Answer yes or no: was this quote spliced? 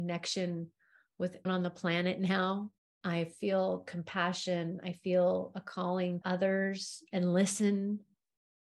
yes